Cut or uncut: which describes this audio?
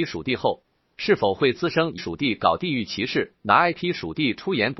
cut